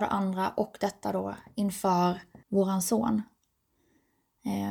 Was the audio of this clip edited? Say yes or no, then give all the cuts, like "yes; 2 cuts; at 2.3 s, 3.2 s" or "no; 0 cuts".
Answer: yes; 1 cut; at 2.4 s